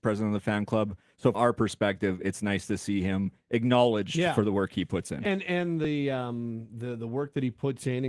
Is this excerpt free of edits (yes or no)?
no